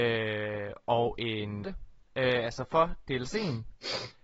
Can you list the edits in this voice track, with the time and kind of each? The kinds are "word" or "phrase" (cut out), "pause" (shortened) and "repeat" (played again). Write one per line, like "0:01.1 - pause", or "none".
0:01.6 - phrase